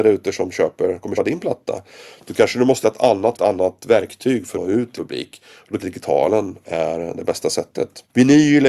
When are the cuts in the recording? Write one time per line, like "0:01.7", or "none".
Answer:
0:01.2
0:02.8
0:03.3
0:04.5
0:05.0
0:05.8

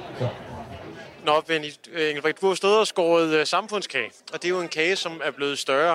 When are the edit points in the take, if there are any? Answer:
0:04.2

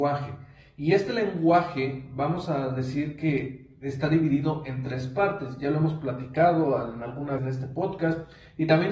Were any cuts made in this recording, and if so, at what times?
0:07.4

